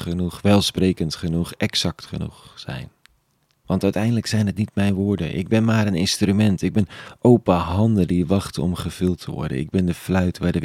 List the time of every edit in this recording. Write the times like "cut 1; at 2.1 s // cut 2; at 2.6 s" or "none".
none